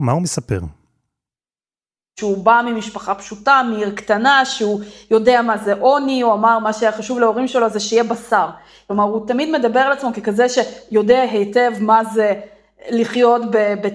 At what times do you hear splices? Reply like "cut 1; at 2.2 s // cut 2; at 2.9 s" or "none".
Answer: none